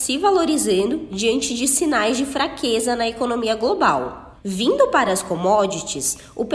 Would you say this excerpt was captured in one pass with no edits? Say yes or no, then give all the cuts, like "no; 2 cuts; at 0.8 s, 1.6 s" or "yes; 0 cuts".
yes; 0 cuts